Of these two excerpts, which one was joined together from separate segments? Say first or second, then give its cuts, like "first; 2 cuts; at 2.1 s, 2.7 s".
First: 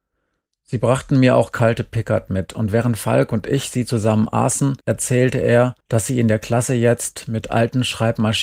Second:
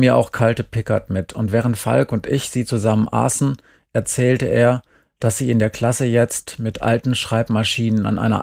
first; 2 cuts; at 4.8 s, 5.8 s